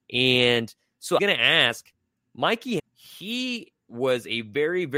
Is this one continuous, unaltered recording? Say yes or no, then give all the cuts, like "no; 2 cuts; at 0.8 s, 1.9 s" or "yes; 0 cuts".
no; 2 cuts; at 1.2 s, 2.8 s